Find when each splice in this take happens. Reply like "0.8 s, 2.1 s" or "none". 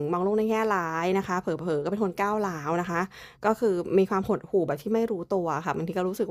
3.3 s